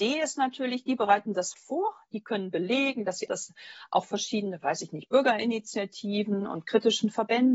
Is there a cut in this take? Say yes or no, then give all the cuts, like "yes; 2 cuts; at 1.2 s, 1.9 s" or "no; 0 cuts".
yes; 2 cuts; at 1.5 s, 3.3 s